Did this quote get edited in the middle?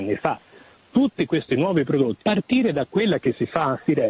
yes; 1 cut; at 2.2 s

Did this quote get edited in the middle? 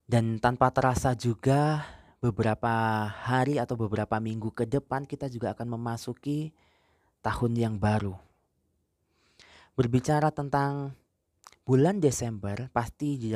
no; 0 cuts

